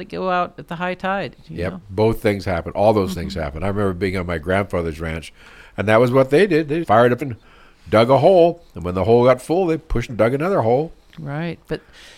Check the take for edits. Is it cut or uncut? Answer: cut